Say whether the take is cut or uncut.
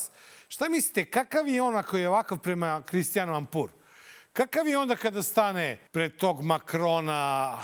cut